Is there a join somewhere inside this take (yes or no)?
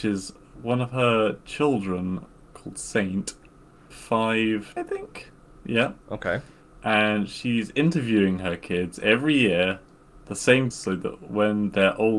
yes